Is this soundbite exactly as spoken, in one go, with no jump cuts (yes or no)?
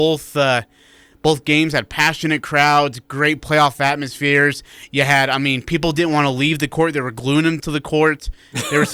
no